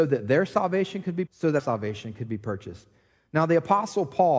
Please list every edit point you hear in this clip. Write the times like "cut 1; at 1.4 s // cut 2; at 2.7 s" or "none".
cut 1; at 1.3 s // cut 2; at 1.6 s